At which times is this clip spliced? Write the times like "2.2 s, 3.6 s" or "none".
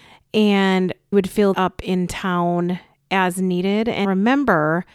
1.1 s, 1.5 s, 4.0 s